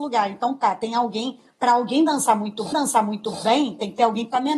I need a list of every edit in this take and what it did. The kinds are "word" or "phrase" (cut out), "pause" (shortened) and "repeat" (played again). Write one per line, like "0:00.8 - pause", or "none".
0:02.7 - repeat

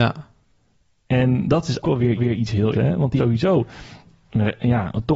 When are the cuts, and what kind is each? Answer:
0:01.8 - word
0:02.2 - repeat
0:02.7 - word
0:03.2 - phrase

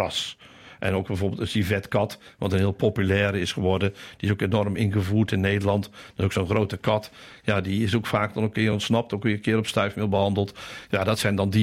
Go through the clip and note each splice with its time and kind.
none

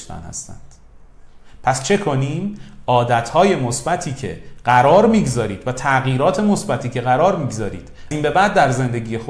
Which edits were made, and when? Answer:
0:08.1 - word

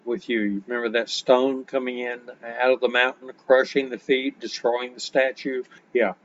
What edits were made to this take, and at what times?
none

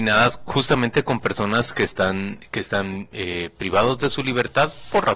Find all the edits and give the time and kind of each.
none

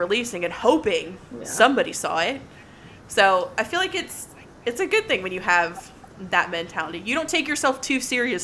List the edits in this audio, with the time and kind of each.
none

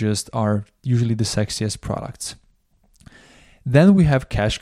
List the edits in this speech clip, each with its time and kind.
none

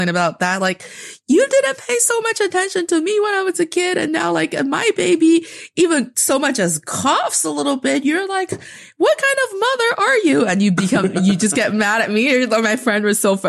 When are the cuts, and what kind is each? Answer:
none

